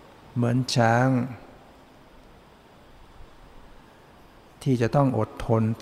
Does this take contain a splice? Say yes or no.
no